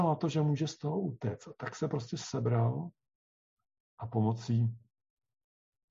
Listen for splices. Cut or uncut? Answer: uncut